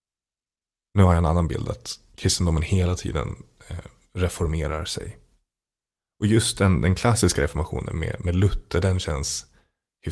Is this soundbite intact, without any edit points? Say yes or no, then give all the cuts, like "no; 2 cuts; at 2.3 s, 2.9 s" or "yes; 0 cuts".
yes; 0 cuts